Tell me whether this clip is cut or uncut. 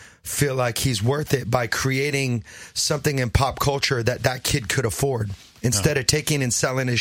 uncut